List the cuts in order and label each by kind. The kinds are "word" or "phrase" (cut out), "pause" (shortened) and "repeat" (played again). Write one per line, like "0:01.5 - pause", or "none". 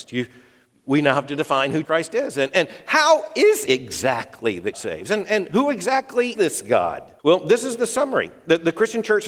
0:01.8 - word
0:03.7 - word
0:04.7 - word
0:06.3 - word
0:07.2 - pause